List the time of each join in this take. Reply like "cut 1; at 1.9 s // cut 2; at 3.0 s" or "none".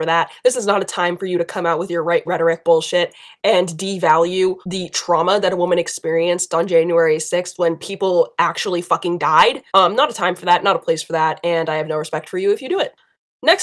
cut 1; at 2.3 s // cut 2; at 4.6 s // cut 3; at 9.7 s